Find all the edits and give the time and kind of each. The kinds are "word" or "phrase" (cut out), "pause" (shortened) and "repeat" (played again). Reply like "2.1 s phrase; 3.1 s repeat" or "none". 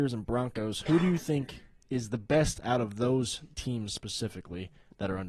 none